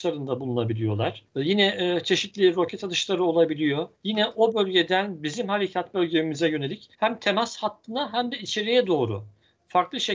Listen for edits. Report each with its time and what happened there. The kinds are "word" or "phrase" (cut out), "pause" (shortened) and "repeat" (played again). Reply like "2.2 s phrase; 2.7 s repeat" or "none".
1.3 s pause; 3.9 s pause; 6.9 s pause